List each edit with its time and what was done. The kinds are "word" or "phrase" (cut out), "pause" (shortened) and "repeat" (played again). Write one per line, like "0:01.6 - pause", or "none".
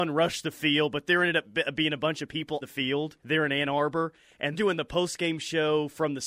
0:02.6 - word
0:03.2 - pause
0:04.5 - word